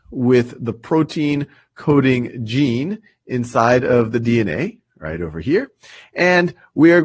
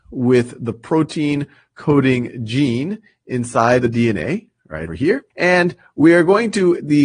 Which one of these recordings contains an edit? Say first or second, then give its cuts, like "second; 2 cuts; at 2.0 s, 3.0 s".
second; 3 cuts; at 3.8 s, 4.9 s, 5.3 s